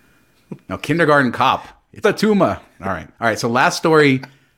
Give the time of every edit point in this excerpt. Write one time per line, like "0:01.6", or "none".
0:02.0
0:03.1